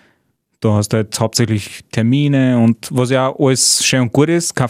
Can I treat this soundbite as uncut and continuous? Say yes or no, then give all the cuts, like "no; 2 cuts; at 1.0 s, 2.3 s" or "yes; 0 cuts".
yes; 0 cuts